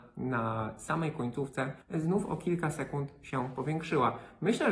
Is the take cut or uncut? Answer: cut